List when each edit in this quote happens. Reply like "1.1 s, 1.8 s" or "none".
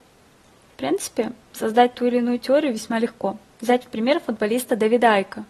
3.5 s